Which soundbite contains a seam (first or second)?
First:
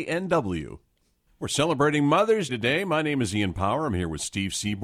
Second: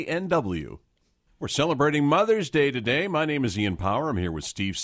first